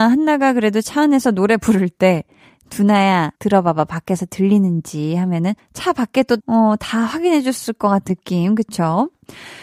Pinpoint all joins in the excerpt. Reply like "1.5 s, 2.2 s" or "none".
3.3 s, 5.6 s, 6.4 s, 8.1 s